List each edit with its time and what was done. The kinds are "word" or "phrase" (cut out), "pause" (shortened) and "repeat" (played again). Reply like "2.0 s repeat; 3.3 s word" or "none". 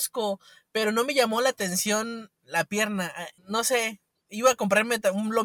3.4 s pause